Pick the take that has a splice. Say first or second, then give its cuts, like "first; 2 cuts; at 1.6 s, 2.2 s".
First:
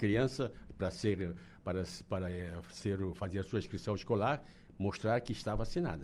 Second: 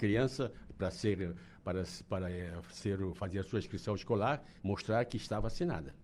second; 1 cut; at 4.6 s